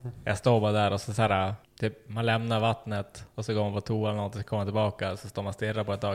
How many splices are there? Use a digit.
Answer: 1